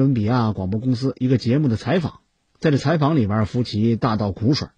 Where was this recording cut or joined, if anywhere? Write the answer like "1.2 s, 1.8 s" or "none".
none